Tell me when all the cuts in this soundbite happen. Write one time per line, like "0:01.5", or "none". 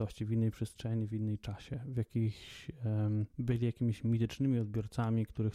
0:03.3